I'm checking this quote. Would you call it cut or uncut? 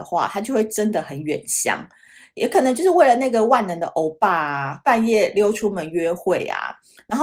uncut